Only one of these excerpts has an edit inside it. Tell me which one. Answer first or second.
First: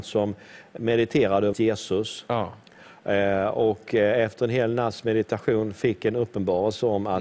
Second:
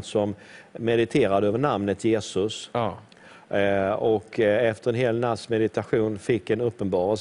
first